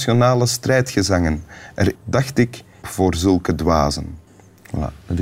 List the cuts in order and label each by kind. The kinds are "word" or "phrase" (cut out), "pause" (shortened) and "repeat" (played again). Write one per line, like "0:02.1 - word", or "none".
0:01.9 - word
0:02.8 - phrase
0:04.3 - pause